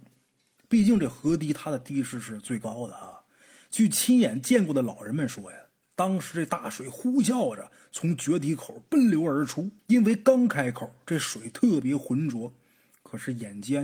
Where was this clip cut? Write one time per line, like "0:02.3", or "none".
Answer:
0:09.8